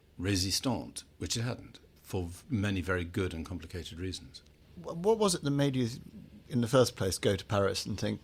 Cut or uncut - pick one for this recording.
uncut